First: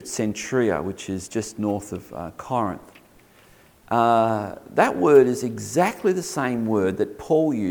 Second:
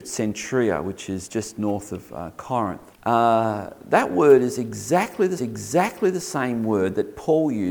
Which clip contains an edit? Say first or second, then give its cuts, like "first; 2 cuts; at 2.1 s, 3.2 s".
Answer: second; 2 cuts; at 2.9 s, 5.4 s